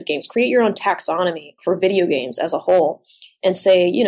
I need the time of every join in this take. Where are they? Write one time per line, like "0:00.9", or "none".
0:01.6